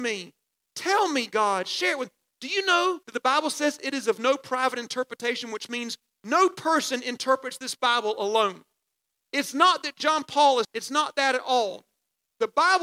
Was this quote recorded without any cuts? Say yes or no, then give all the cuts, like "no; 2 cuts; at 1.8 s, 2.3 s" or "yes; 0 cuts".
no; 2 cuts; at 3.0 s, 10.6 s